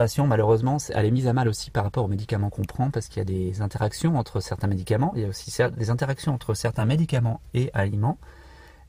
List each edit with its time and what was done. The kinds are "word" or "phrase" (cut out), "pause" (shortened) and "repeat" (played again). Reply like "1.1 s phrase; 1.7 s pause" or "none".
none